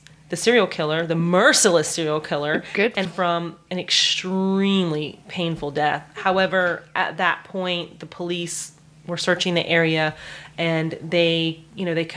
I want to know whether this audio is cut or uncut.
cut